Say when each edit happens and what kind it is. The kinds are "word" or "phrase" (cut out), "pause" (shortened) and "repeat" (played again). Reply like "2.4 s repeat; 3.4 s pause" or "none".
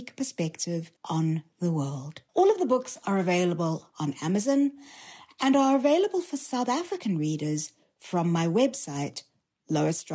1.0 s pause; 2.3 s pause